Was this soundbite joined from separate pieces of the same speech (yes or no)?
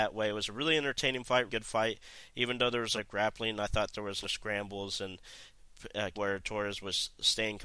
yes